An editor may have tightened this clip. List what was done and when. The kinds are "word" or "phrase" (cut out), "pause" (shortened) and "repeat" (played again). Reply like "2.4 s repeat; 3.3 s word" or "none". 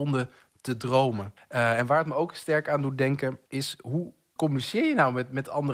1.4 s pause; 3.5 s pause; 4.4 s word

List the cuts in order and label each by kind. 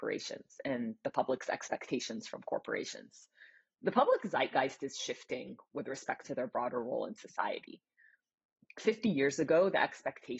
6.2 s phrase

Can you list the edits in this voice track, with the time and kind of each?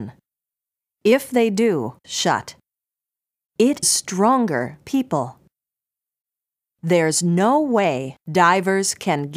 2.0 s phrase; 3.8 s word; 4.8 s phrase

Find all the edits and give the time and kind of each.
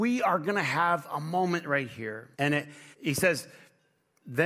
2.3 s pause; 2.9 s pause

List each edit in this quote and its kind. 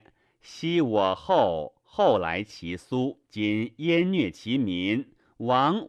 3.3 s pause

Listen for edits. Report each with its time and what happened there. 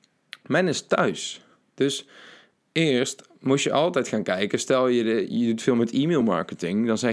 none

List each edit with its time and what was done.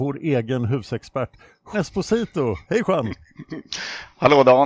1.7 s word; 2.6 s pause

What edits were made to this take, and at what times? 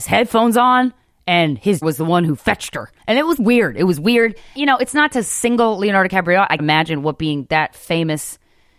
1.8 s word; 3.0 s pause; 3.4 s word; 4.6 s word; 6.6 s word

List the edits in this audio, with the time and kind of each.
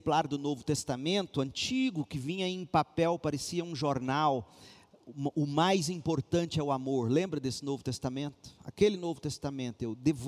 none

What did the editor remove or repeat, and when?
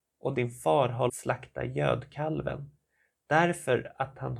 1.1 s word

